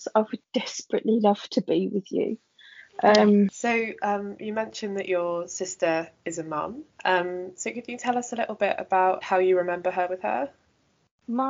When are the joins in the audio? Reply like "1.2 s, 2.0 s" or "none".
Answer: 6.9 s, 9.2 s